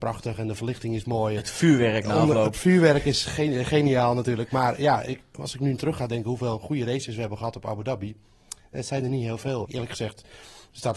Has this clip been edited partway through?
yes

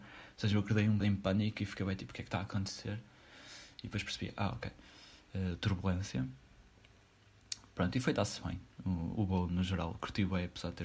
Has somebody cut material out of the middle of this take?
yes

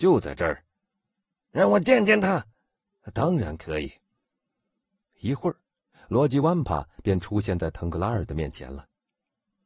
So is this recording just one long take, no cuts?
yes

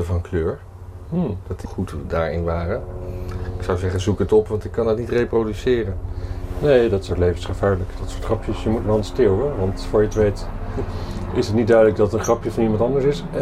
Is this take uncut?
no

